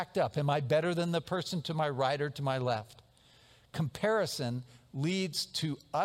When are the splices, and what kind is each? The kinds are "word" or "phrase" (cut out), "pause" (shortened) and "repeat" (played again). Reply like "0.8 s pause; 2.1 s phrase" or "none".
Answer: none